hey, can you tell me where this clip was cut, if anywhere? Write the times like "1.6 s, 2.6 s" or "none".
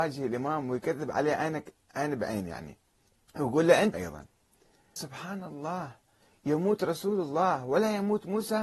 3.1 s, 3.9 s, 5.0 s